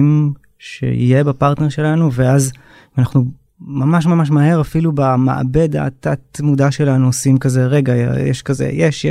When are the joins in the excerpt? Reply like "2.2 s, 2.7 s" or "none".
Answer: none